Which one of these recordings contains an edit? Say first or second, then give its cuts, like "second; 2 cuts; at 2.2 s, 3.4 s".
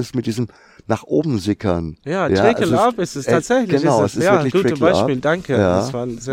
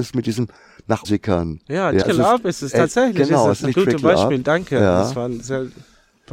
second; 3 cuts; at 1.0 s, 2.0 s, 3.6 s